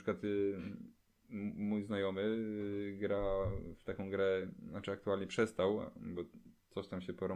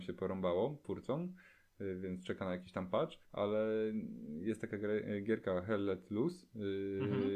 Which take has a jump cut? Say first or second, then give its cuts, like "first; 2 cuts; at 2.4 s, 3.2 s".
second; 1 cut; at 3.2 s